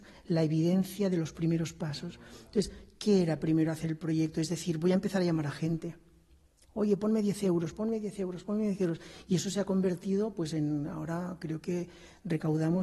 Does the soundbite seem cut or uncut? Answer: uncut